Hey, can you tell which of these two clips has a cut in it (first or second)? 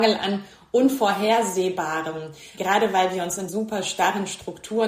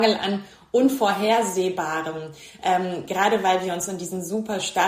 first